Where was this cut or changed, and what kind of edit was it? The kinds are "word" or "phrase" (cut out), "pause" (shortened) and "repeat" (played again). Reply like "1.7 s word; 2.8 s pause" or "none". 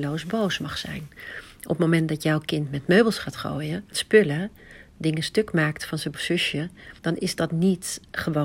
3.9 s word; 6.1 s word; 7.0 s pause

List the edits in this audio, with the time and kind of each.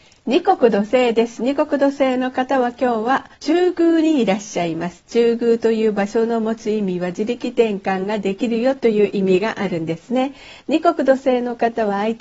3.3 s pause

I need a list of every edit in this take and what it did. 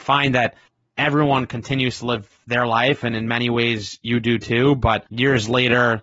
5.1 s pause

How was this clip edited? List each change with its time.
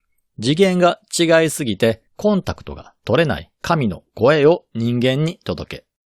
2.1 s pause

